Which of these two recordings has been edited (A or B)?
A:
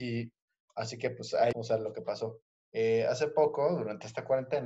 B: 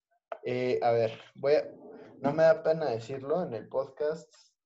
A